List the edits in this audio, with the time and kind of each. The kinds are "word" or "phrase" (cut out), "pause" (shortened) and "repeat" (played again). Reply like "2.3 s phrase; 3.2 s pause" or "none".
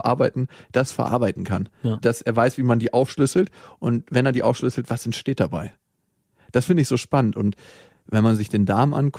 none